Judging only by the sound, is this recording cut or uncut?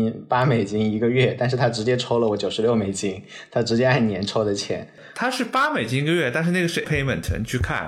cut